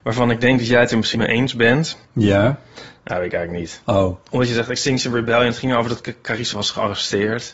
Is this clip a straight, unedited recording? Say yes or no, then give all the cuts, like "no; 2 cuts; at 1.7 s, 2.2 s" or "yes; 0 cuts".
no; 3 cuts; at 1.1 s, 2.0 s, 6.5 s